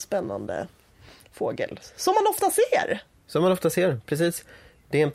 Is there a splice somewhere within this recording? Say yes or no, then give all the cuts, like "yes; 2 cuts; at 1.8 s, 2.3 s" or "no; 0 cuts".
no; 0 cuts